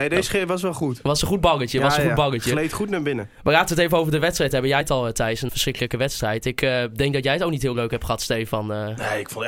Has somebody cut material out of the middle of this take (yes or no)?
yes